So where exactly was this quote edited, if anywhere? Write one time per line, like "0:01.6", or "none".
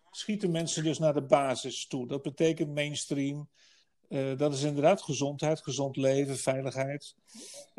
none